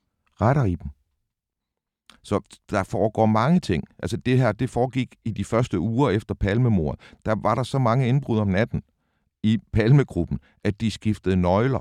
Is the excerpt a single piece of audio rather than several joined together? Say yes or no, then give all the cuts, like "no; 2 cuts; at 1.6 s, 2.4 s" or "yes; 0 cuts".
yes; 0 cuts